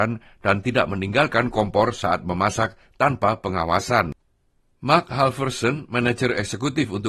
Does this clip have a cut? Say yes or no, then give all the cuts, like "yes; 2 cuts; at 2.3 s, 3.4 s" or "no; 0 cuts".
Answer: no; 0 cuts